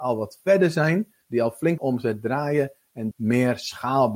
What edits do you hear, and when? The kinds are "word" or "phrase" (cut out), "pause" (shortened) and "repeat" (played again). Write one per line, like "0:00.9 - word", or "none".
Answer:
0:01.2 - pause
0:01.8 - word
0:03.1 - phrase